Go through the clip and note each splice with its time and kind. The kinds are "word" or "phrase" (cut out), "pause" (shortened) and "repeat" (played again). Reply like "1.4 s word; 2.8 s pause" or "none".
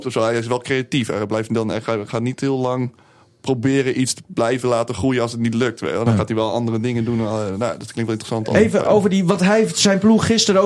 none